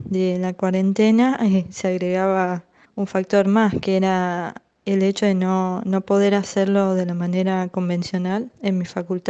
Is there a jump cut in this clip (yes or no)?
yes